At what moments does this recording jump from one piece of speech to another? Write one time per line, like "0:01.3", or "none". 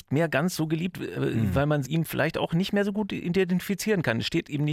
0:00.9
0:01.8